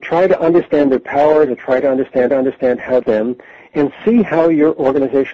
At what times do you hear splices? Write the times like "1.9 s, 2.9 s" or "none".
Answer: 2.3 s, 3.0 s